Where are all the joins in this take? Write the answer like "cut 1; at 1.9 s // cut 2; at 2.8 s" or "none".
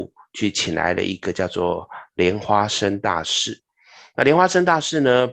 none

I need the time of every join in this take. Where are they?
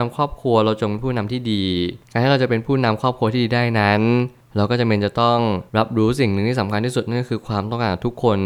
cut 1; at 5.7 s

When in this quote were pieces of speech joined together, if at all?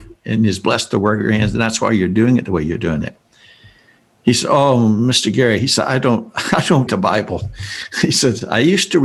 cut 1; at 6.9 s

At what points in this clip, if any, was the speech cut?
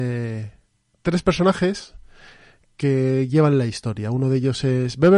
none

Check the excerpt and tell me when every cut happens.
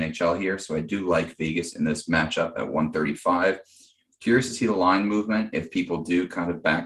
none

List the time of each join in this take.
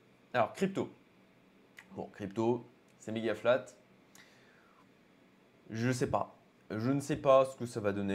none

